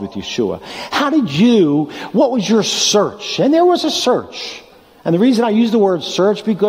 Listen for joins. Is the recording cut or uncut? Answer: uncut